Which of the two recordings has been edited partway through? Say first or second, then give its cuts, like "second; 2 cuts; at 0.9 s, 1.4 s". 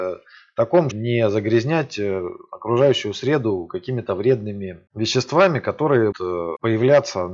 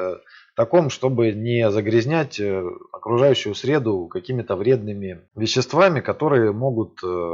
first; 2 cuts; at 0.9 s, 6.1 s